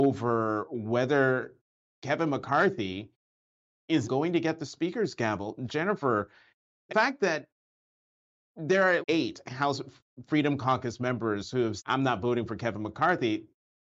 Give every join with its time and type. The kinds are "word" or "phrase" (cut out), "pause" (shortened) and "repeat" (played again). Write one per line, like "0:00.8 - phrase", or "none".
0:04.0 - word
0:06.9 - phrase
0:09.0 - word
0:11.8 - word